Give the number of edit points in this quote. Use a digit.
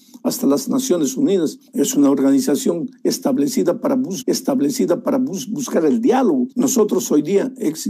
3